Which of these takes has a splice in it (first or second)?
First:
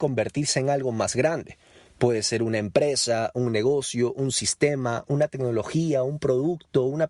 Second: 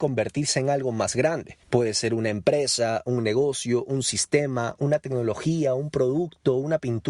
second